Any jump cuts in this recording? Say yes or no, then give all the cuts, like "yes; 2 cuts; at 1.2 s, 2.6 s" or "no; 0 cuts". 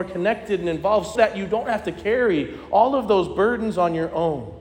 yes; 1 cut; at 1.2 s